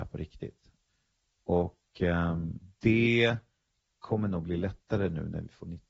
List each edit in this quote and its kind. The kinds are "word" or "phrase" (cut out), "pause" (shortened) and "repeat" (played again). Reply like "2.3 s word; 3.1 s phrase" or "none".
none